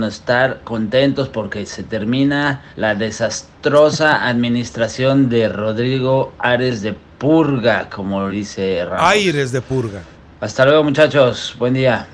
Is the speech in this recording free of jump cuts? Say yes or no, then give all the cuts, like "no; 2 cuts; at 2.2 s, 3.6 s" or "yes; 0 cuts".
no; 4 cuts; at 2.7 s, 8.3 s, 8.9 s, 10.1 s